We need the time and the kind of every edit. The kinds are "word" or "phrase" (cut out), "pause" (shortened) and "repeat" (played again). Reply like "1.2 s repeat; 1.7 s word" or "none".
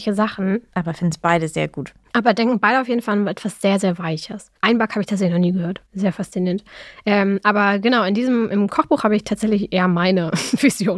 4.6 s pause; 5.9 s pause